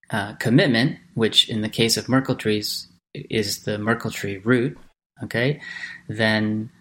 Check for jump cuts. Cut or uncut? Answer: uncut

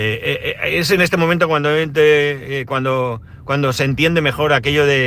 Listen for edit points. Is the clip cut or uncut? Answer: uncut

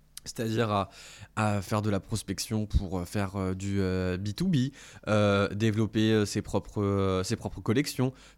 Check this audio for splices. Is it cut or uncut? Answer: uncut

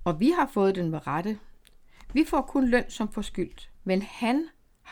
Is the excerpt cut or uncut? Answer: cut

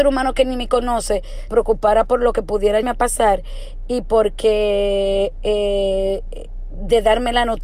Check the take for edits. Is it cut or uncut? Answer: cut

